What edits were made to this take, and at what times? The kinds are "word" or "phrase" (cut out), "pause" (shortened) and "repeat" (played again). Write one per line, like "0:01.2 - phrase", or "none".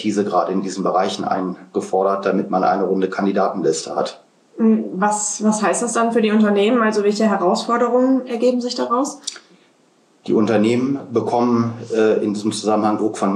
none